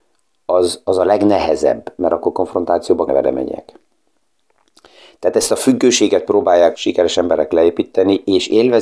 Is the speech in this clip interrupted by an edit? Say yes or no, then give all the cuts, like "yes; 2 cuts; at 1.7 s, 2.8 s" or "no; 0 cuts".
yes; 2 cuts; at 3.1 s, 6.7 s